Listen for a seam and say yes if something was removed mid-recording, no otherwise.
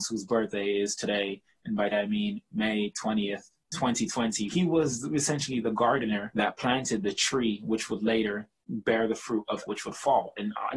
yes